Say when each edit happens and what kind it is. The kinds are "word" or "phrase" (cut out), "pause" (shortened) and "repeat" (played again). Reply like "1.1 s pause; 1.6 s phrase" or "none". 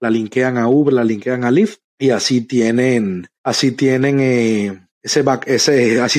1.9 s pause; 3.4 s pause